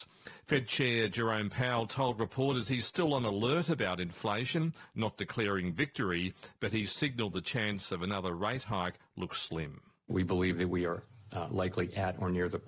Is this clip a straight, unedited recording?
yes; 0 cuts

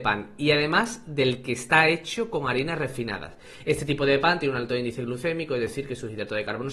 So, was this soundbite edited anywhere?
no; 0 cuts

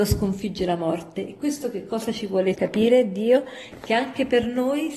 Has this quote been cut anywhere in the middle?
yes; 1 cut; at 2.5 s

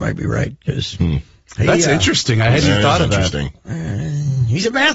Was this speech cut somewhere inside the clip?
no; 0 cuts

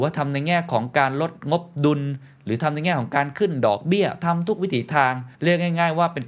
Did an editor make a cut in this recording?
yes; 1 cut; at 5.3 s

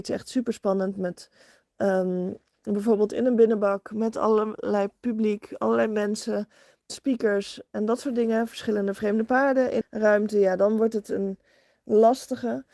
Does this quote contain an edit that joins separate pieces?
yes; 2 cuts; at 6.9 s, 9.8 s

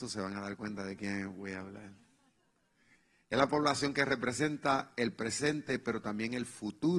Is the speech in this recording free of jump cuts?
yes; 0 cuts

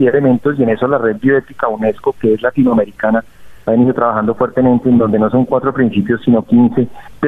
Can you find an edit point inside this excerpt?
no; 0 cuts

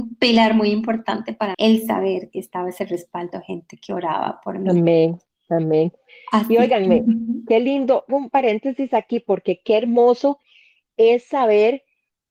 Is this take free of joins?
no; 3 cuts; at 1.5 s, 2.3 s, 8.1 s

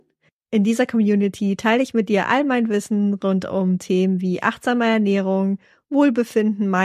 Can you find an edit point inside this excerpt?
no; 0 cuts

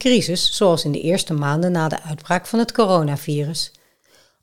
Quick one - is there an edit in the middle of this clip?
no; 0 cuts

